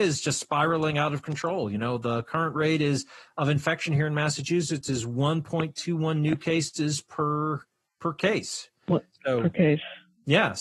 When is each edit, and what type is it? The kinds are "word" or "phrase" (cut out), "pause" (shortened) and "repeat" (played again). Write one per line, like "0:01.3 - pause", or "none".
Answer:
none